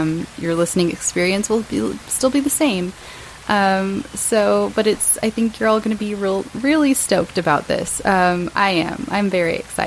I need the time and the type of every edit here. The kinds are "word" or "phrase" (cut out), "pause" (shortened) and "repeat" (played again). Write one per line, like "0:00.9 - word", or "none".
none